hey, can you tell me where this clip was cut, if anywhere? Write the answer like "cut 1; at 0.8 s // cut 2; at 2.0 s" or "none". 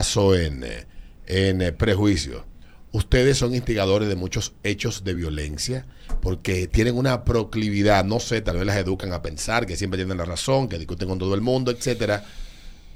none